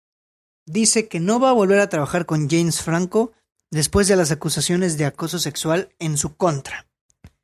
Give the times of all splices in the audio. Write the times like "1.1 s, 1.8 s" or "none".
none